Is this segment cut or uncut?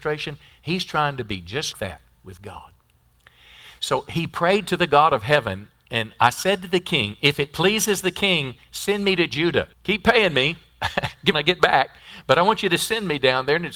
cut